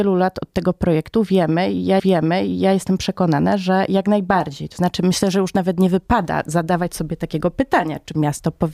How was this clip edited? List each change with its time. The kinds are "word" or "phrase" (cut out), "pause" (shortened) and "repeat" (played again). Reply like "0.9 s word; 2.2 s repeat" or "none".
2.0 s repeat